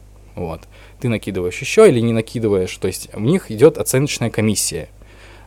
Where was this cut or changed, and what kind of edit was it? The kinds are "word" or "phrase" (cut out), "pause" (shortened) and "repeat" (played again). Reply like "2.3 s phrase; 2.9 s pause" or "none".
none